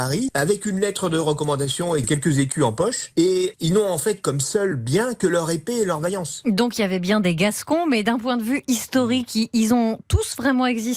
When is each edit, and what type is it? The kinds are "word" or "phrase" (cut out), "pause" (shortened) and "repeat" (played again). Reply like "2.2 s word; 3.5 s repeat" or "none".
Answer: 3.5 s word